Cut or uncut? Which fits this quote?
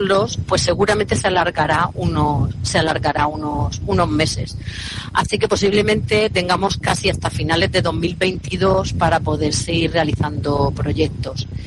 uncut